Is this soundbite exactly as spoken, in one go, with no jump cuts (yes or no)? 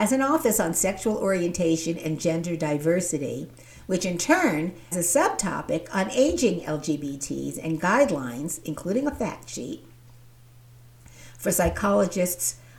no